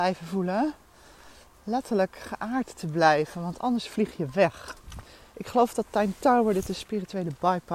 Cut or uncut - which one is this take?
uncut